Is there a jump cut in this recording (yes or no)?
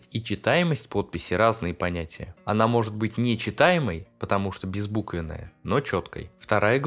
no